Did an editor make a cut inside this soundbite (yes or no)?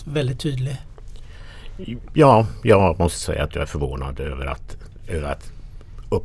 no